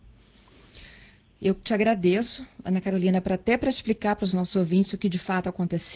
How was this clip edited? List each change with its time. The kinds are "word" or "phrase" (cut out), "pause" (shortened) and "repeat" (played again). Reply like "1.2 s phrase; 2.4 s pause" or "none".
none